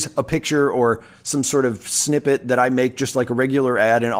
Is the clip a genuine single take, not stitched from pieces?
yes; 0 cuts

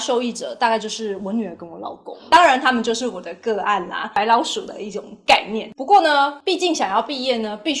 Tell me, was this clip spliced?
no; 0 cuts

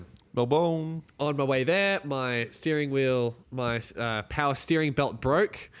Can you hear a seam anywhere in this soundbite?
yes; 2 cuts; at 1.1 s, 3.4 s

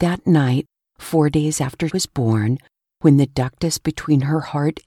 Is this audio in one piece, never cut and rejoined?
no; 1 cut; at 1.9 s

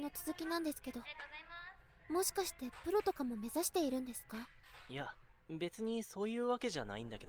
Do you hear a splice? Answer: yes; 1 cut; at 5.4 s

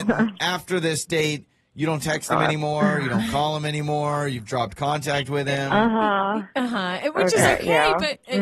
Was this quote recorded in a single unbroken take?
yes; 0 cuts

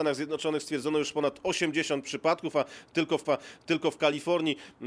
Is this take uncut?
no; 1 cut; at 3.2 s

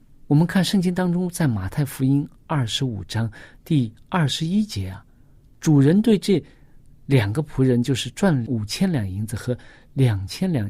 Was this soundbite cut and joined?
no; 0 cuts

